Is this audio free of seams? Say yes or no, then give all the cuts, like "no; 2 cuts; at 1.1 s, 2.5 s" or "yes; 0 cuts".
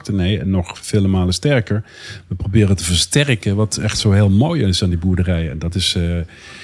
yes; 0 cuts